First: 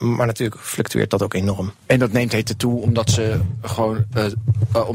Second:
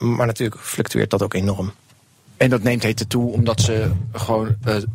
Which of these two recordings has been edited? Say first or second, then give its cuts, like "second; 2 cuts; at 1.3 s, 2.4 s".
first; 1 cut; at 1.8 s